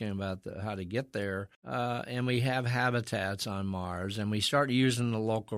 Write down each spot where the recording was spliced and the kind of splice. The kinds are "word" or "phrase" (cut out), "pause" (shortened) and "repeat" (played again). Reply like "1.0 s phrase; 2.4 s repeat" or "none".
1.5 s pause